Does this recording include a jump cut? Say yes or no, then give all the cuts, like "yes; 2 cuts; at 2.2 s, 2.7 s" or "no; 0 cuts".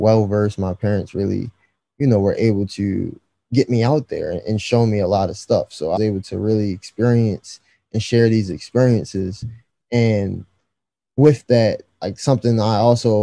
yes; 1 cut; at 6.0 s